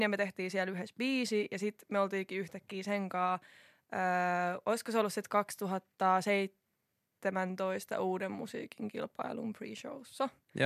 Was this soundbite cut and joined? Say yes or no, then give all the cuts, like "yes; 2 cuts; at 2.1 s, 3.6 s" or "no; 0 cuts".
no; 0 cuts